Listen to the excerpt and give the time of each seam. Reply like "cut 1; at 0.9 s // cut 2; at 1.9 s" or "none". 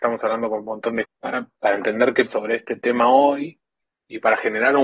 cut 1; at 1.0 s // cut 2; at 1.6 s // cut 3; at 2.3 s